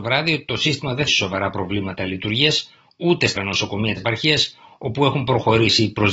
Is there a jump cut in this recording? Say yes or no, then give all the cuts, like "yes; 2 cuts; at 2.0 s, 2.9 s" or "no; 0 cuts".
yes; 3 cuts; at 1.1 s, 3.4 s, 4.0 s